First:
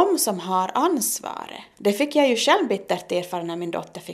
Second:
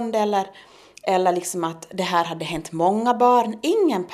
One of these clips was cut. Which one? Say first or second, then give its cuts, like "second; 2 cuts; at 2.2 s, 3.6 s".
first; 1 cut; at 1.7 s